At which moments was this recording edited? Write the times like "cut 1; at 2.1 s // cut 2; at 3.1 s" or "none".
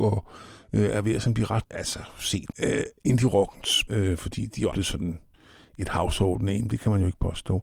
cut 1; at 1.6 s // cut 2; at 2.5 s // cut 3; at 3.9 s // cut 4; at 4.7 s